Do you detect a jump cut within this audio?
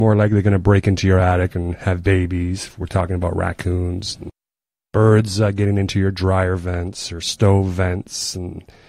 no; 0 cuts

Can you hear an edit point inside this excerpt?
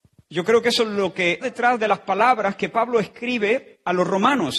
yes; 1 cut; at 1.4 s

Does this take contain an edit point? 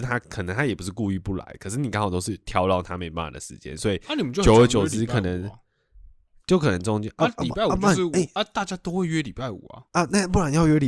no; 0 cuts

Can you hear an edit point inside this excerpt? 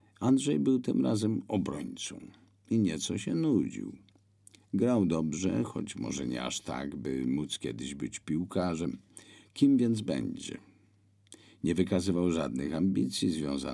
no; 0 cuts

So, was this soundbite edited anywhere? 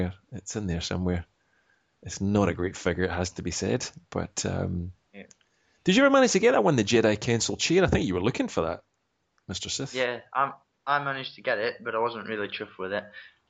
no; 0 cuts

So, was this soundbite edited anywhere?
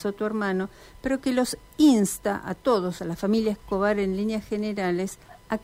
yes; 1 cut; at 3.0 s

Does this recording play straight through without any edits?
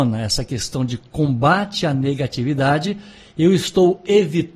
yes; 0 cuts

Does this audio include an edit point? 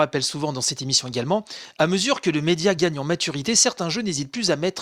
no; 0 cuts

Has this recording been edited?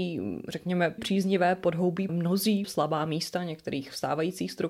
yes; 3 cuts; at 1.0 s, 2.1 s, 2.6 s

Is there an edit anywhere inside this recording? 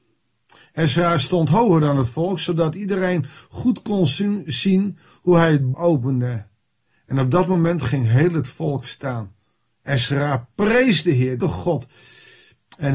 yes; 2 cuts; at 5.7 s, 11.4 s

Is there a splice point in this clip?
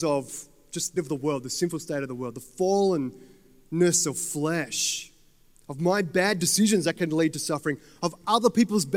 yes; 1 cut; at 1.0 s

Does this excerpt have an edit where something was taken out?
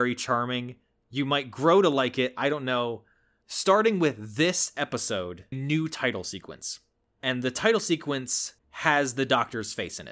yes; 2 cuts; at 5.5 s, 8.6 s

